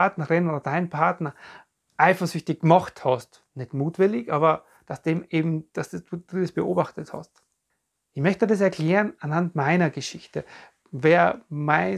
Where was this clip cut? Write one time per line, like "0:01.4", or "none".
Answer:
0:07.7

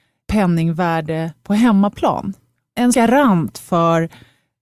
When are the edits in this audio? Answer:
0:02.9

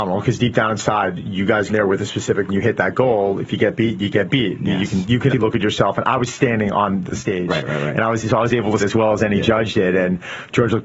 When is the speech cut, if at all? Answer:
0:01.7
0:02.5
0:05.3
0:07.1
0:08.8

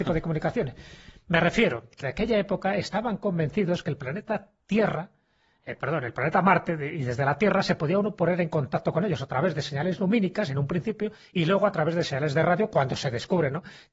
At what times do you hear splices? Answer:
0:02.0
0:04.6

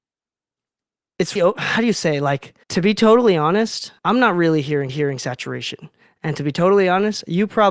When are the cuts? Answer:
0:01.4
0:02.6
0:04.0
0:04.9

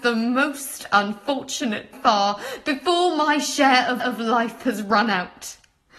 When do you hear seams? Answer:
0:01.9
0:04.0

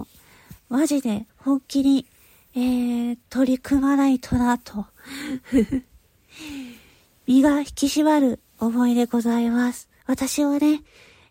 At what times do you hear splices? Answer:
0:01.3
0:10.0

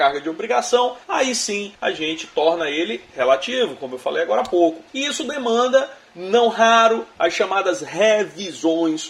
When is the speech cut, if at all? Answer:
0:01.0
0:01.7
0:04.9

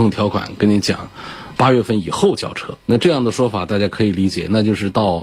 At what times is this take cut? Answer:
0:01.6
0:02.8

